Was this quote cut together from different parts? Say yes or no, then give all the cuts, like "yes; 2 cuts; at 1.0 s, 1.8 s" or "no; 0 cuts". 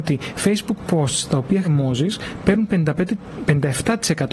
yes; 1 cut; at 1.6 s